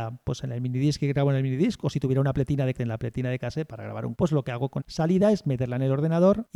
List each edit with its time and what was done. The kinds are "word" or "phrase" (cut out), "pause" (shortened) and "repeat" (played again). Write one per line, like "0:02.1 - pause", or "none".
0:02.7 - word
0:04.1 - word
0:04.8 - word